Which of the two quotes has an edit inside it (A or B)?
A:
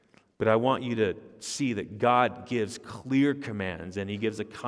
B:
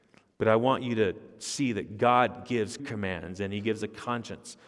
B